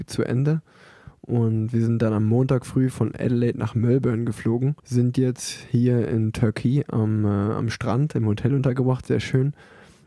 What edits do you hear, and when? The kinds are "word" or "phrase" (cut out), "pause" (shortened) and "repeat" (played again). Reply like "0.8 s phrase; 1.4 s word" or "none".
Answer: 4.8 s pause